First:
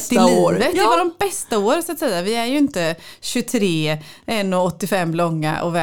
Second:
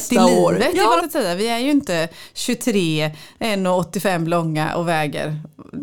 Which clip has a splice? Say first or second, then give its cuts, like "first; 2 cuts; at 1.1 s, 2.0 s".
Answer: second; 1 cut; at 1.0 s